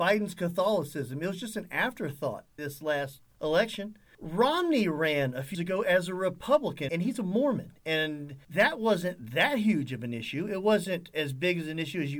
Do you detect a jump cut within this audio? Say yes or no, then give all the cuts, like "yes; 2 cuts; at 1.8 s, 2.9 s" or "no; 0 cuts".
yes; 3 cuts; at 2.6 s, 5.5 s, 6.9 s